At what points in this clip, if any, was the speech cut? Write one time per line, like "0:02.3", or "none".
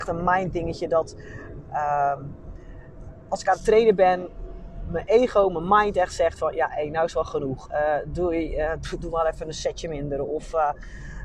none